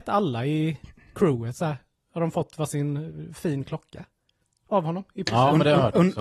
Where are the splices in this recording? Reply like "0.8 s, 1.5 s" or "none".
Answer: none

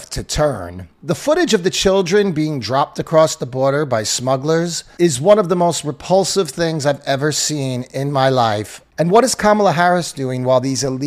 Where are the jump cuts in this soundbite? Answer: 0.9 s

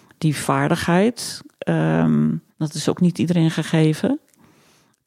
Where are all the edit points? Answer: 2.5 s

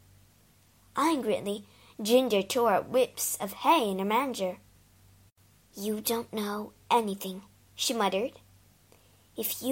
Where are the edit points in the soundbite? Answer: none

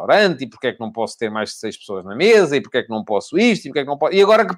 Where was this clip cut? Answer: none

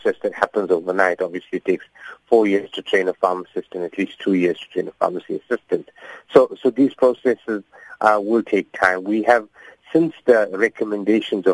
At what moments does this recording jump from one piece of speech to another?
none

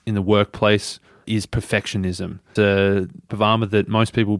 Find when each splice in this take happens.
1.2 s, 2.6 s, 3.3 s

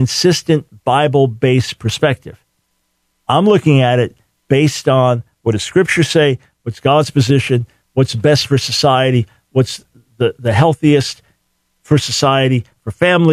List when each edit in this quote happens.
none

